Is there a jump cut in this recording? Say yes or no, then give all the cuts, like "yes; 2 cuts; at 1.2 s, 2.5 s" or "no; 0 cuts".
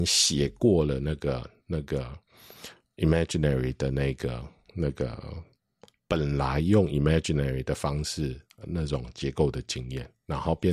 no; 0 cuts